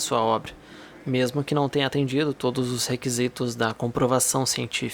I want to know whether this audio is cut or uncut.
uncut